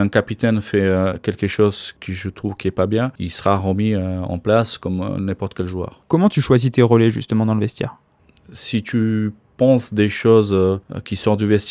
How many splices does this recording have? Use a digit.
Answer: 0